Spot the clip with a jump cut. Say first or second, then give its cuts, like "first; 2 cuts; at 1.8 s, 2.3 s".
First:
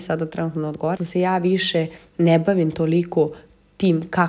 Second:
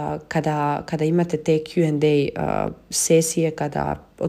first; 1 cut; at 1.0 s